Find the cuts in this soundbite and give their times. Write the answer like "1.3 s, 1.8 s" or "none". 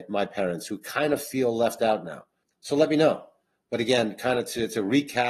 2.4 s